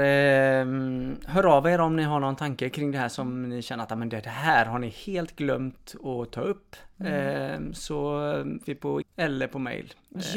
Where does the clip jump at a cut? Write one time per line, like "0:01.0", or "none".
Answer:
0:02.7
0:08.6
0:09.0